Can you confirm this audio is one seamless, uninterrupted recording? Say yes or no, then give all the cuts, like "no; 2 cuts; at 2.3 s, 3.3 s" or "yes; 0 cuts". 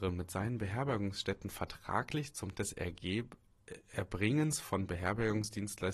no; 1 cut; at 2.5 s